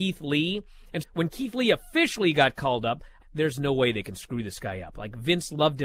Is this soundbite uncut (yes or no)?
no